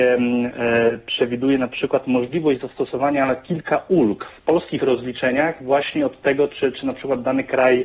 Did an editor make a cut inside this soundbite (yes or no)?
no